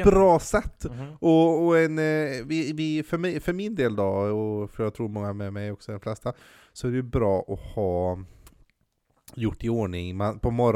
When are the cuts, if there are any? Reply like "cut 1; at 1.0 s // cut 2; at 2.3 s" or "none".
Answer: none